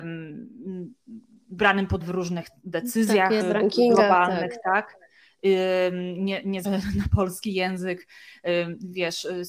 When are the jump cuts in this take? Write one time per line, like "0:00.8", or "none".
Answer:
0:02.0
0:03.4
0:06.6